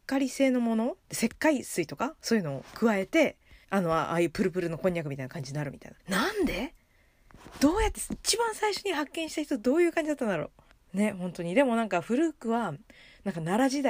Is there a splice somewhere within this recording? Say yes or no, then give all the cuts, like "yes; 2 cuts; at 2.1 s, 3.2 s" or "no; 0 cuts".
yes; 4 cuts; at 1.0 s, 3.6 s, 6.0 s, 10.7 s